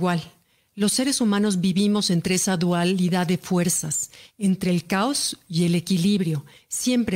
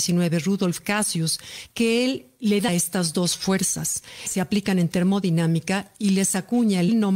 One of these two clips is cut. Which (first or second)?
second